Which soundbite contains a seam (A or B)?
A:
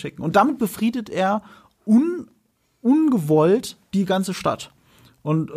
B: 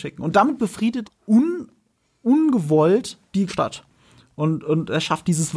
B